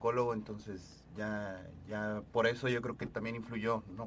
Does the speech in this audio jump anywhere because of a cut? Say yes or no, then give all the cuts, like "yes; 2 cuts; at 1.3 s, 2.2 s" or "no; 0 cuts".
no; 0 cuts